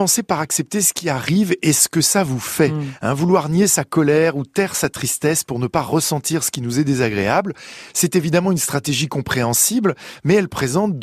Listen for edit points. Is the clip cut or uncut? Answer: uncut